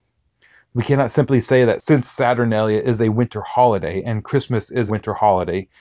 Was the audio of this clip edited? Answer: yes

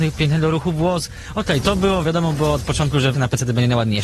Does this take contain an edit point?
yes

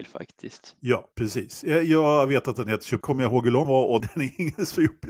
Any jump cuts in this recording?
yes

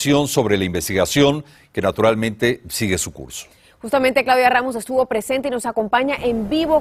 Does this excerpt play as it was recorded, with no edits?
yes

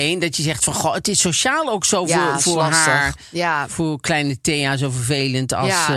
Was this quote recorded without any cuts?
yes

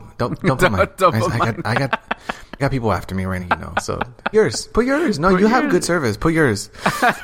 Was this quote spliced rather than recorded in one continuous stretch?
yes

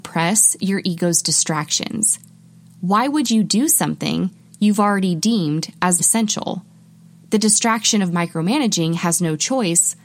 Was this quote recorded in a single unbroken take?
no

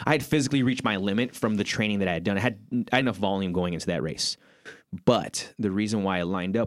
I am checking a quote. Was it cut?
yes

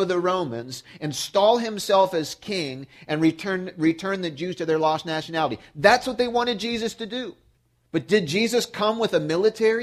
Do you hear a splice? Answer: yes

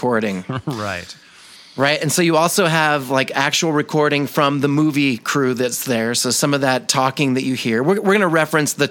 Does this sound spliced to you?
no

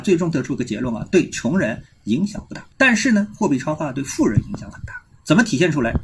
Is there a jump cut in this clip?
yes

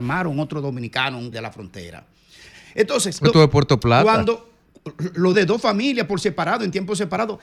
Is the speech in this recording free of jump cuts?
no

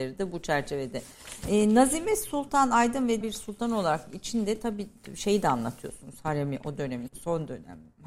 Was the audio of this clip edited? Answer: yes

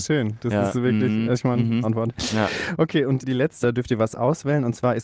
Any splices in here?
yes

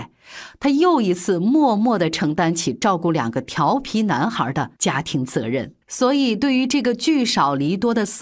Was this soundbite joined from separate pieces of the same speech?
yes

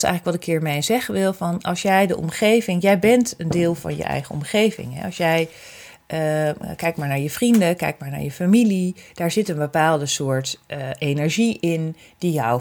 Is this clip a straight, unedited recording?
yes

